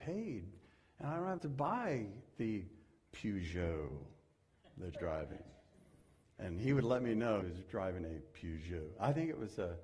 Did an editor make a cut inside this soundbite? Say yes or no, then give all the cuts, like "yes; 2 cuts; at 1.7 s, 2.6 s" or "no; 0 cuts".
yes; 3 cuts; at 1.4 s, 4.9 s, 7.4 s